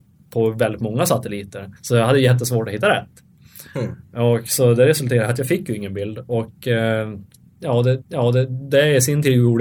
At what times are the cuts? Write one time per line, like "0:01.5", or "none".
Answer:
0:01.8
0:08.0